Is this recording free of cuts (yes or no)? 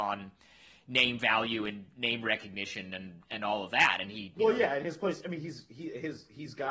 yes